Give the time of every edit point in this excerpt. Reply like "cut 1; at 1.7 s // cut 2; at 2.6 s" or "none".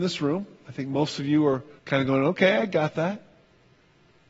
cut 1; at 1.8 s